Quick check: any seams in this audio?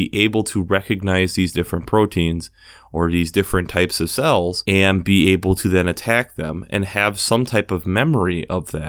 no; 0 cuts

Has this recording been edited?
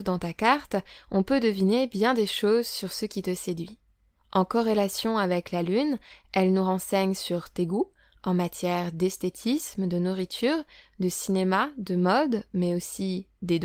no; 0 cuts

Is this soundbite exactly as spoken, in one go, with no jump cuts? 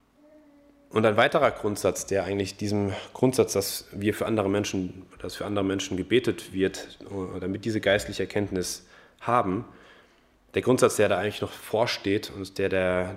yes; 0 cuts

